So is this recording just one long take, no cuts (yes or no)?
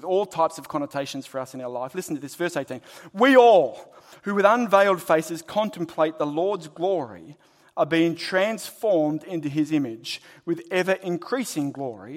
yes